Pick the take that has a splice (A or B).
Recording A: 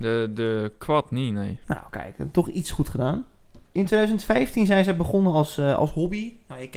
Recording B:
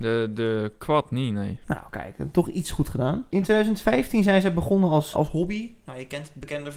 B